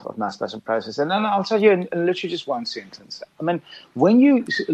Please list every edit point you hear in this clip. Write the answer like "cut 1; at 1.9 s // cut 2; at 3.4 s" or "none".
none